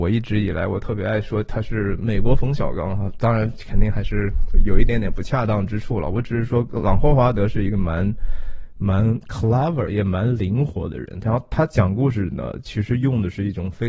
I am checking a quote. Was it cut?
yes; 1 cut; at 9.9 s

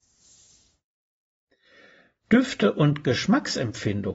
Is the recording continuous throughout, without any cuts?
yes; 0 cuts

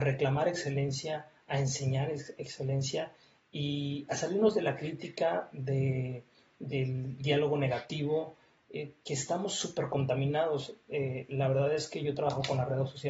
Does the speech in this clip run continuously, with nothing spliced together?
yes; 0 cuts

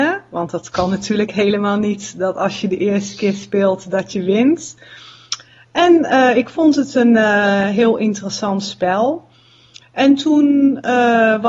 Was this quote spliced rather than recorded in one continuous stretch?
no; 0 cuts

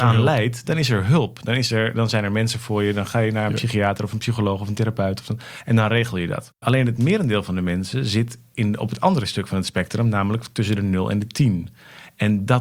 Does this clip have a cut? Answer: no; 0 cuts

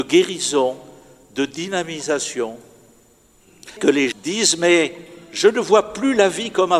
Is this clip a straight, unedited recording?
no; 2 cuts; at 3.8 s, 4.1 s

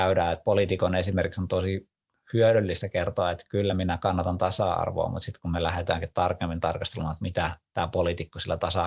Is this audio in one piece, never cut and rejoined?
yes; 0 cuts

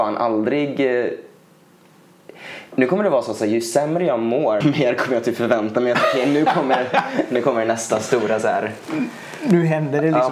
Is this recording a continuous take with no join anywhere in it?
no; 1 cut; at 4.6 s

